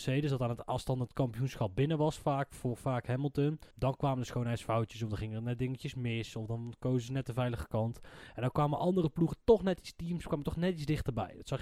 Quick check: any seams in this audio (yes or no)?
yes